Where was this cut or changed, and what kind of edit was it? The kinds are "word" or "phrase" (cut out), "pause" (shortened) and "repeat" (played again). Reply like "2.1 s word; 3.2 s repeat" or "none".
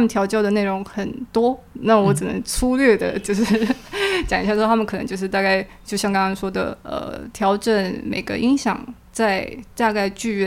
6.8 s pause